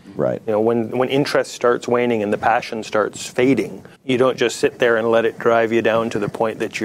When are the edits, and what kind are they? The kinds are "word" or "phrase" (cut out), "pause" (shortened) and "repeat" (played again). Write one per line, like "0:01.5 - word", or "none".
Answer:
0:03.9 - pause